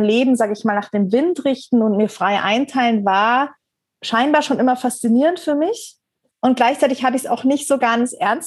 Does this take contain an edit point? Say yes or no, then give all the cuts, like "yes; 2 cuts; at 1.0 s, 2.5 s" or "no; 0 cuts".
no; 0 cuts